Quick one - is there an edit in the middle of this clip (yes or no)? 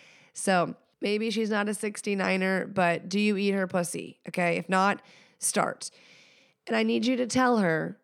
no